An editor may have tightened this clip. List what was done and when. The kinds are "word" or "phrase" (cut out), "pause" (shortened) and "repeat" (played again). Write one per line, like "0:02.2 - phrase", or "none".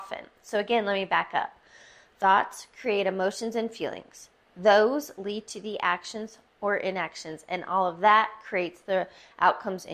none